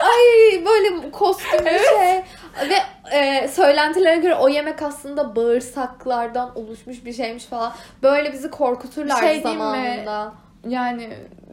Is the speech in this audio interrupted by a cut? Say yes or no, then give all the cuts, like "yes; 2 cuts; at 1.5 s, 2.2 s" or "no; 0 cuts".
no; 0 cuts